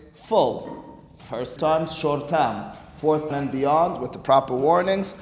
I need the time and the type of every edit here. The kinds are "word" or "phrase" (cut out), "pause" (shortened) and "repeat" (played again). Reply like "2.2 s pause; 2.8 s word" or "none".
1.6 s word; 3.3 s word